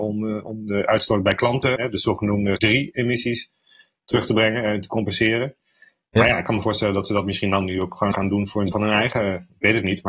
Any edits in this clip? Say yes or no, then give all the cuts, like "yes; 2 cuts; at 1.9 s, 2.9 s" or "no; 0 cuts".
yes; 4 cuts; at 1.8 s, 2.6 s, 8.1 s, 8.7 s